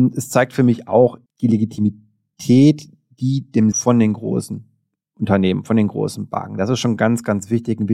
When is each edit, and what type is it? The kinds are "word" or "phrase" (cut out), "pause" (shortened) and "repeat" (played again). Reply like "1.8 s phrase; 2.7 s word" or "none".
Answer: 1.3 s word; 3.7 s phrase